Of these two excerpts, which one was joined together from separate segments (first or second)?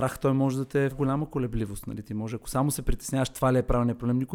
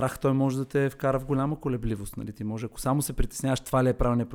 first